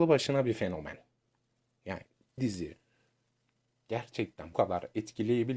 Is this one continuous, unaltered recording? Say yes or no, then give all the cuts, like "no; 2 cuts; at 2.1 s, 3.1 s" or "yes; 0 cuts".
no; 2 cuts; at 2.4 s, 4.5 s